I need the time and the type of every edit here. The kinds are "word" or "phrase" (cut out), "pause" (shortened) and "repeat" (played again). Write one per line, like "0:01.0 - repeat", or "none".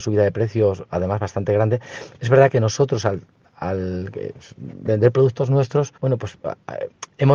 0:06.0 - pause